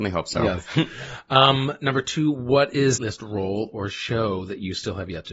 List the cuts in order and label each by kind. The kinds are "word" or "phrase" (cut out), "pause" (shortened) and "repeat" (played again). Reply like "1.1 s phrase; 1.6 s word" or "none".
3.0 s phrase